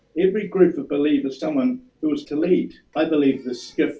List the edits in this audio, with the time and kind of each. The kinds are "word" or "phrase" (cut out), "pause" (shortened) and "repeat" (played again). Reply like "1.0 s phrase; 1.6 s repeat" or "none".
1.4 s word; 1.9 s pause; 2.2 s word; 2.8 s pause

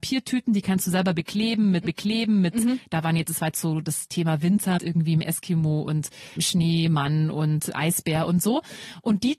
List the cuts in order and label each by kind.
1.8 s repeat; 4.8 s word; 6.4 s word

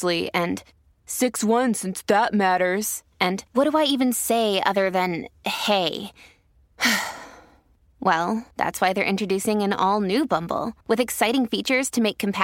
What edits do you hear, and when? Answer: 3.5 s pause; 8.5 s pause; 10.8 s pause

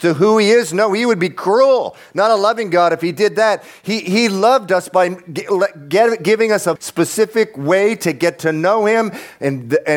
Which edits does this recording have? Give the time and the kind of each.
6.8 s word

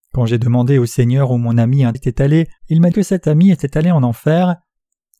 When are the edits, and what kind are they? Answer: 1.9 s word; 2.6 s pause; 2.9 s word

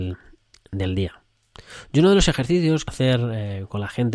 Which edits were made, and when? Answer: 2.9 s word

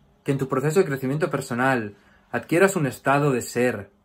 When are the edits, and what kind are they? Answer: none

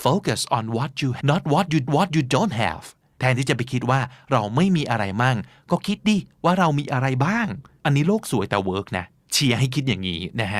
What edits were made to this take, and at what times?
1.2 s word; 1.9 s repeat

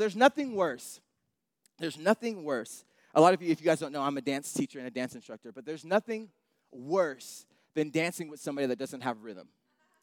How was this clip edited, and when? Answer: none

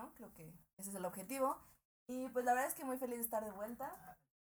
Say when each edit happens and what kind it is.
none

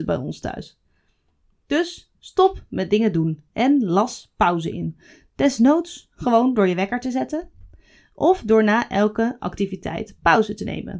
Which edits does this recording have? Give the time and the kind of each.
none

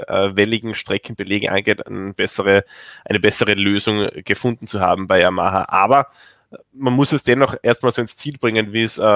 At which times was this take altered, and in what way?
none

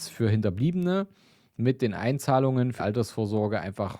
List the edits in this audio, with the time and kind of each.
2.8 s word

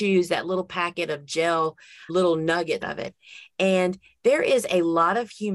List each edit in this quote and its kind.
2.1 s word; 2.8 s word

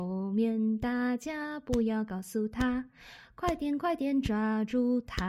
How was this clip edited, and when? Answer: none

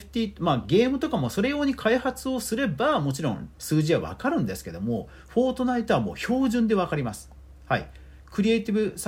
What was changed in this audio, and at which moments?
3.5 s pause

